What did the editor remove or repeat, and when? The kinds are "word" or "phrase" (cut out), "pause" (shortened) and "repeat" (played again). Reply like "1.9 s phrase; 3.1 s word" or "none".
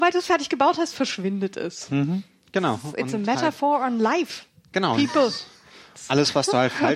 none